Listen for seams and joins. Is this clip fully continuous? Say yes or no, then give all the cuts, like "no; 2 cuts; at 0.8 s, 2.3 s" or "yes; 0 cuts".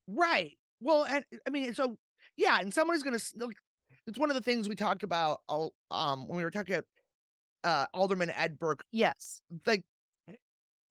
yes; 0 cuts